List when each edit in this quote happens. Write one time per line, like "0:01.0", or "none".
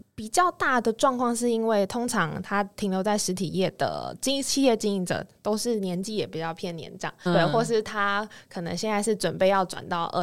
0:07.3